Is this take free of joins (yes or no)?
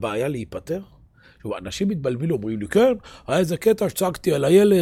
yes